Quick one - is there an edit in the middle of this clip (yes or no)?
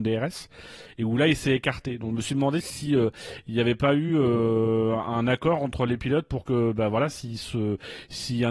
no